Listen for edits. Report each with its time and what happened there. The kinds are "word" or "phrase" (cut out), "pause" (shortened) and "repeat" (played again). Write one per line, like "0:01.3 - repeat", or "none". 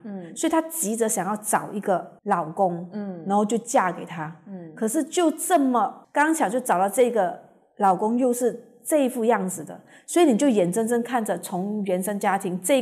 none